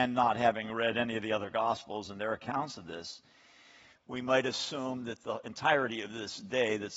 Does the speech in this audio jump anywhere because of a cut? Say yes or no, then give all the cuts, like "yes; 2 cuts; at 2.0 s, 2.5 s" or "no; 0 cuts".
no; 0 cuts